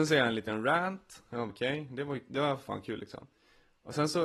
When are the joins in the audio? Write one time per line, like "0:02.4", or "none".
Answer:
0:01.5